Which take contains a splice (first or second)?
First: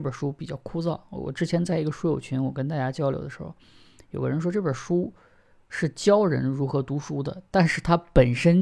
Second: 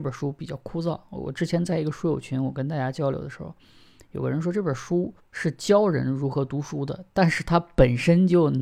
second